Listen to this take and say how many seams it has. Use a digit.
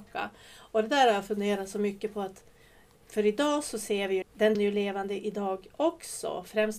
2